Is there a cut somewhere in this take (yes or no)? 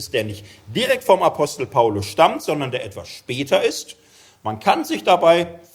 no